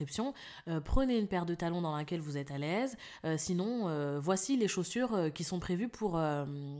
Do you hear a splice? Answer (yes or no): no